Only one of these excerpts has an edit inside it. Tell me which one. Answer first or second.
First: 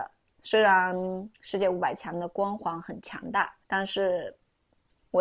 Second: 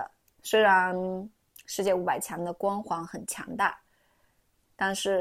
first